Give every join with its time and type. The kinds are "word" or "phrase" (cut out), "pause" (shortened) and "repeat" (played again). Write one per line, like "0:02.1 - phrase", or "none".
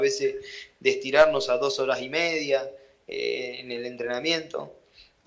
none